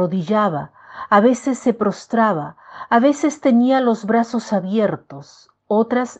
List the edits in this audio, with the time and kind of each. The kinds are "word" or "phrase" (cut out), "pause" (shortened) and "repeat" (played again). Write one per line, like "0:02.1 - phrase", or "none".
none

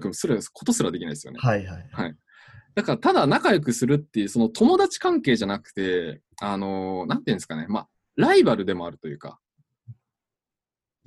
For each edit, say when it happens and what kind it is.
none

